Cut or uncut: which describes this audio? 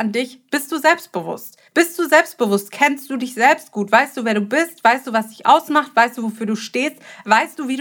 cut